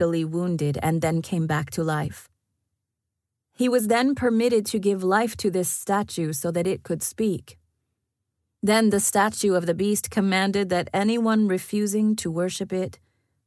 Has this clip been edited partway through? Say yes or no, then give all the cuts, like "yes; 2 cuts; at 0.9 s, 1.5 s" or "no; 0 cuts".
no; 0 cuts